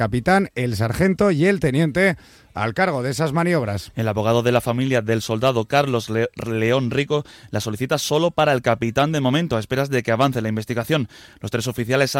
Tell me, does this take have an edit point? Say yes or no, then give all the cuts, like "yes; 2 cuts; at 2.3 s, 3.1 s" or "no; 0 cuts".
no; 0 cuts